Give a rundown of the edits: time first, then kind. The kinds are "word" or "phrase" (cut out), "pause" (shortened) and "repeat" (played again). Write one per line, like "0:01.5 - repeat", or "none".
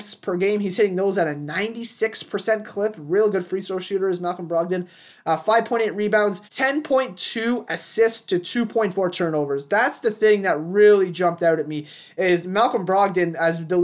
0:06.5 - pause